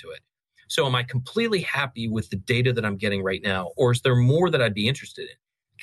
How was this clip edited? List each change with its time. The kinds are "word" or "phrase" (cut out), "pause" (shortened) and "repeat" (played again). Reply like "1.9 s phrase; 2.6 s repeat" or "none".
none